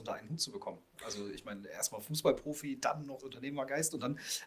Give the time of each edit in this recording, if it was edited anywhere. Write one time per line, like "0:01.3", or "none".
0:03.2